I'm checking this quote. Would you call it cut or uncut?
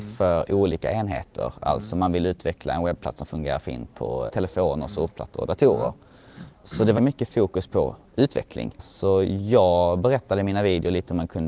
cut